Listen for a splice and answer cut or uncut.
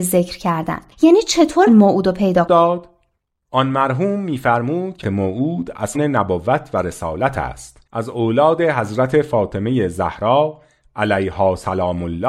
cut